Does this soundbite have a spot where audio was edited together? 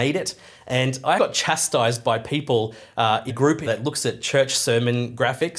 yes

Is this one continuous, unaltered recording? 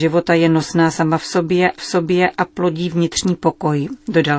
no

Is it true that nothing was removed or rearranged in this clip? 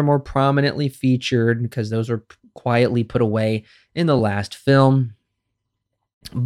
yes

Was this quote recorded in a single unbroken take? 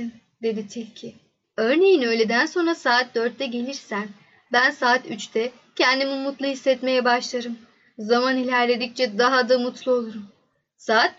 yes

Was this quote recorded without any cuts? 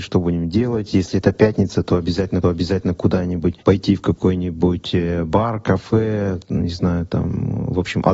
no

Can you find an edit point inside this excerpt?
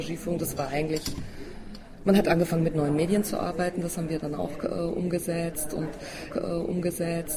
yes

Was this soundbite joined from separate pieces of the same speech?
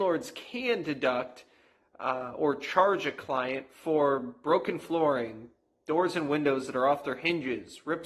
no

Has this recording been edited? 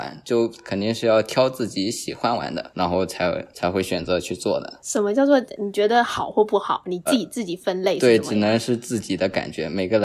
yes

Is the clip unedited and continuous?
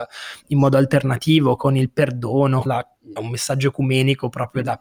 no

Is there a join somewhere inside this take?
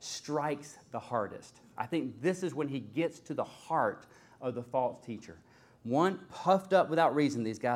no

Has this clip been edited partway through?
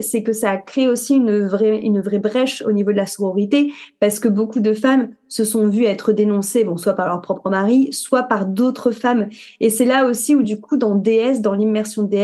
no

